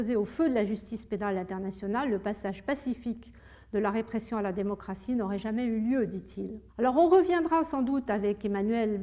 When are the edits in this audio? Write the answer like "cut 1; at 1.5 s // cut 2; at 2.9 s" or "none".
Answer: cut 1; at 6.7 s